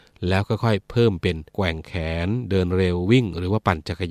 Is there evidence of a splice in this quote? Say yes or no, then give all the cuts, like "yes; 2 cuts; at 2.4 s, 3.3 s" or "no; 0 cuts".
yes; 1 cut; at 1.5 s